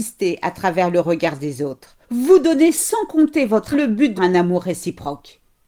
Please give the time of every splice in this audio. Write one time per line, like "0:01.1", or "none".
0:02.0
0:03.7
0:04.2